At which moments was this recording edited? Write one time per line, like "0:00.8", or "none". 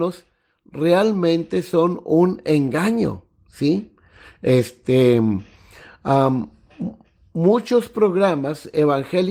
none